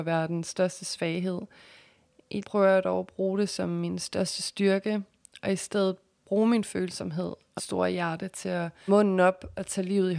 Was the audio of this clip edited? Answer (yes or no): yes